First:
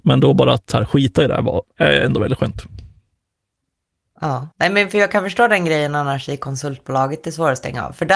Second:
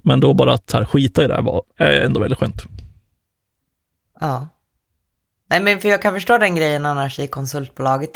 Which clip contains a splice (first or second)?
first